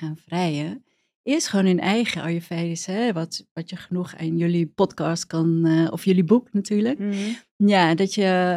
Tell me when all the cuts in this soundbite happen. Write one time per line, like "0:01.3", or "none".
none